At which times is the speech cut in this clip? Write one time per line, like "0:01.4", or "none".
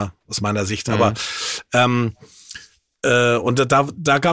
none